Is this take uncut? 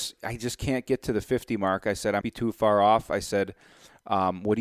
no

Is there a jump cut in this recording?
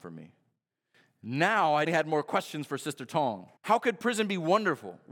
yes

